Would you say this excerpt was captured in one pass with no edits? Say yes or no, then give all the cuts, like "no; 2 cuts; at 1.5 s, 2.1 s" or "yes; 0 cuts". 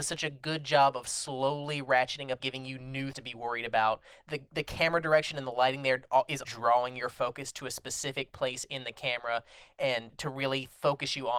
no; 4 cuts; at 2.4 s, 3.1 s, 6.4 s, 10.1 s